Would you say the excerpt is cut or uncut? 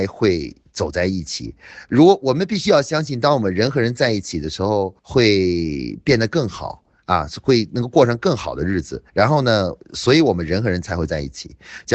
cut